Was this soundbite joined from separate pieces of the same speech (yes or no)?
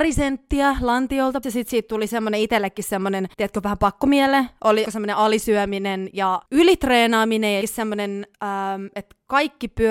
yes